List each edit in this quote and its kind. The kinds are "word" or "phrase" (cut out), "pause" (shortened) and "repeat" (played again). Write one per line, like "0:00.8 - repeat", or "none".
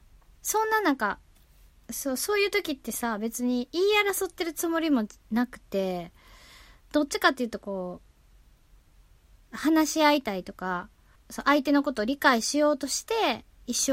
0:11.1 - pause